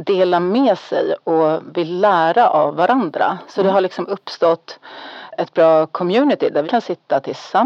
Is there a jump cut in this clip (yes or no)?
yes